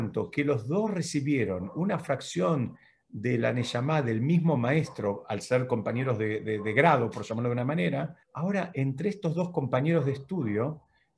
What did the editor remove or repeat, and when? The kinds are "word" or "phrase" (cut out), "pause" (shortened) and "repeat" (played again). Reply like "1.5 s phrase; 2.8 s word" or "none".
8.2 s pause